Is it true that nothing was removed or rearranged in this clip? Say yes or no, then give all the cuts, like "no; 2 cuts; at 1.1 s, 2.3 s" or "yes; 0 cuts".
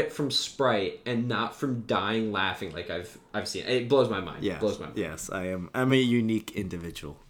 yes; 0 cuts